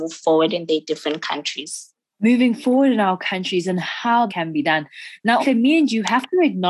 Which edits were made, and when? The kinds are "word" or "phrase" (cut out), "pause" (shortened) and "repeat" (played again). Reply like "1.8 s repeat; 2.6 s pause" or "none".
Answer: 1.9 s pause; 4.3 s word; 5.4 s word